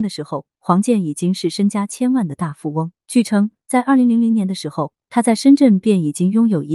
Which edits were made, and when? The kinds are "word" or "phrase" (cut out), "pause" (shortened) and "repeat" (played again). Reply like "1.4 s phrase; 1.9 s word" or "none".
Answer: 3.0 s pause